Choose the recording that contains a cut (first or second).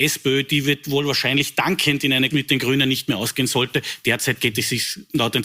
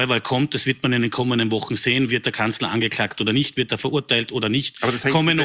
first